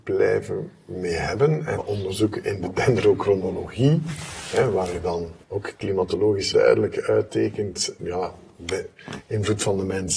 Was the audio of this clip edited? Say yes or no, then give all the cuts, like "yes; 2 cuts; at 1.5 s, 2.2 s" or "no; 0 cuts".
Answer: yes; 4 cuts; at 1.8 s, 5.4 s, 6.5 s, 8.0 s